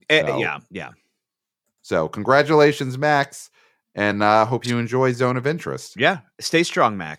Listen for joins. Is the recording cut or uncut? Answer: uncut